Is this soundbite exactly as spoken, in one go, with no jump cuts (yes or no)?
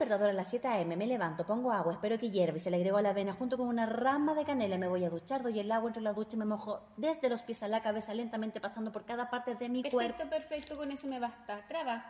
yes